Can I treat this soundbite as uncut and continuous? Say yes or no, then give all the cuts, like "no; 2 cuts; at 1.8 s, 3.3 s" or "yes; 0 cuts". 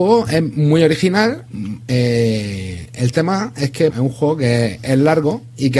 no; 1 cut; at 3.9 s